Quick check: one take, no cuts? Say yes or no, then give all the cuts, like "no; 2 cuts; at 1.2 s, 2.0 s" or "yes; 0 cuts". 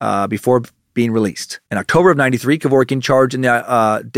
no; 1 cut; at 1.7 s